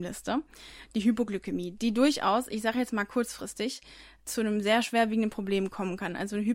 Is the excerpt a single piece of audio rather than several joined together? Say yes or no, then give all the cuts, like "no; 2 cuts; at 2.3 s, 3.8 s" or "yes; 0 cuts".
no; 1 cut; at 4.2 s